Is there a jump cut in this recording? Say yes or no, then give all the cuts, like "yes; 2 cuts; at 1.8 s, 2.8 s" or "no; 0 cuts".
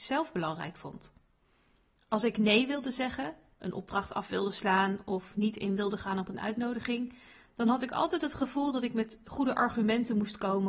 no; 0 cuts